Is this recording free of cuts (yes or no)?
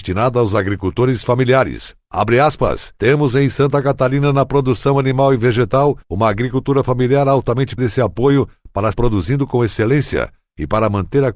no